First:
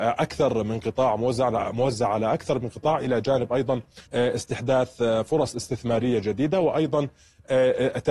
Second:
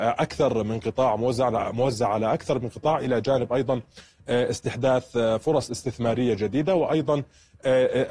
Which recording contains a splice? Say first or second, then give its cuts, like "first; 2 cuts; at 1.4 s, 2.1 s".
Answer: first; 1 cut; at 4.0 s